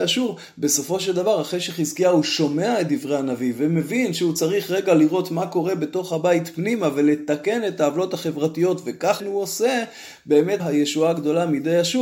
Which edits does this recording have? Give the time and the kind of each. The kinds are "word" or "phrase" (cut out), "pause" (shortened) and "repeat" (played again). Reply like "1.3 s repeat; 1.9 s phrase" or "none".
9.2 s word; 10.6 s word